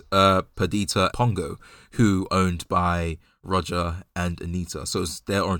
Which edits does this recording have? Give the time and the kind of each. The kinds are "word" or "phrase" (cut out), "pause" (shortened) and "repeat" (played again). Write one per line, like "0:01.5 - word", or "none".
0:01.1 - word
0:02.3 - word